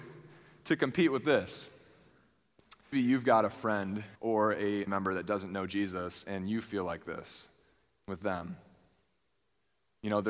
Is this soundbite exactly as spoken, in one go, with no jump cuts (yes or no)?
no